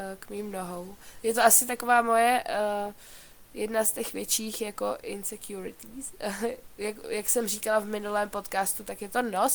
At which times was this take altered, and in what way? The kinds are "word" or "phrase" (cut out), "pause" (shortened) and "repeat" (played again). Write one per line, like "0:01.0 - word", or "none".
none